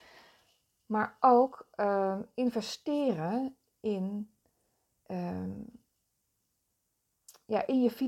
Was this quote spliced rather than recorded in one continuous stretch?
no; 0 cuts

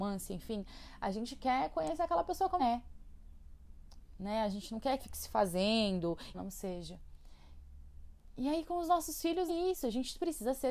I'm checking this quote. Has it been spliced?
yes; 4 cuts; at 2.6 s, 5.0 s, 6.3 s, 9.5 s

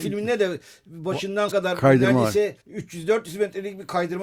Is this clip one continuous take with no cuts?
no; 2 cuts; at 1.5 s, 2.6 s

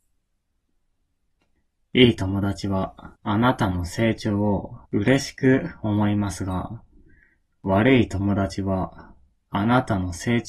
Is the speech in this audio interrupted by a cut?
yes; 2 cuts; at 3.1 s, 4.8 s

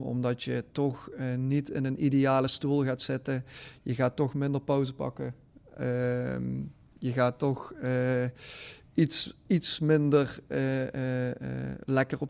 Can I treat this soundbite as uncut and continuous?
yes; 0 cuts

